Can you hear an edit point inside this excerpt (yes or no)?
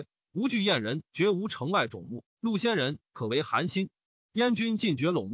no